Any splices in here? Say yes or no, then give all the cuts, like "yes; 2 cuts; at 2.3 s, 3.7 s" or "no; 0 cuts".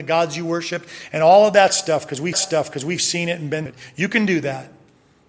yes; 2 cuts; at 2.3 s, 3.7 s